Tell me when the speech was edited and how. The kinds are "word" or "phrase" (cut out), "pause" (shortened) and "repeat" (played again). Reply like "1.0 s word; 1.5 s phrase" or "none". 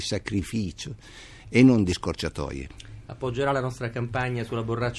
none